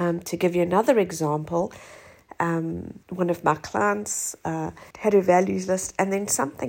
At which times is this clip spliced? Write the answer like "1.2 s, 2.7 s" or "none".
3.0 s, 4.9 s